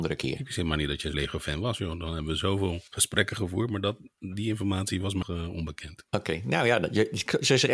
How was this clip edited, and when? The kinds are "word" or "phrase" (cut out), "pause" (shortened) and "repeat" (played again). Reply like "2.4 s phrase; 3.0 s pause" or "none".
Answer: 1.1 s word; 2.9 s pause; 5.2 s word; 6.1 s pause

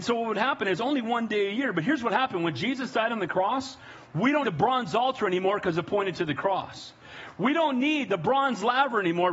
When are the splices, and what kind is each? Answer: 4.4 s word

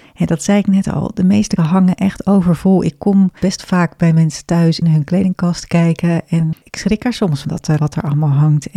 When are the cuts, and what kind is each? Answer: 1.6 s word; 3.4 s pause; 4.8 s phrase; 6.5 s word; 7.4 s word; 7.8 s word

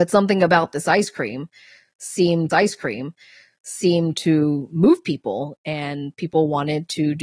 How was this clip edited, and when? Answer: 2.5 s repeat

